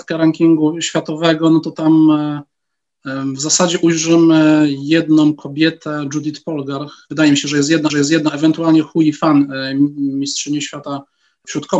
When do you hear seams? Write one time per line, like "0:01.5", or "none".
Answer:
0:07.9